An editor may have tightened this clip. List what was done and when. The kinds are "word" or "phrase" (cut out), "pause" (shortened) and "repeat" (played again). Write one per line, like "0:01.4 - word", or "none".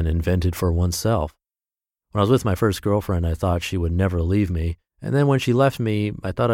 0:04.9 - pause